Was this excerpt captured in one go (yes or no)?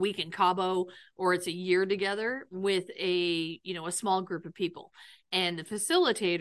yes